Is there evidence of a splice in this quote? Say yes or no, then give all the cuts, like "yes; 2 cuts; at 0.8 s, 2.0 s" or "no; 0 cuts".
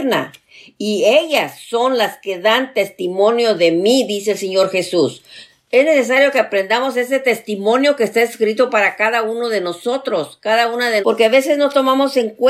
yes; 1 cut; at 11.0 s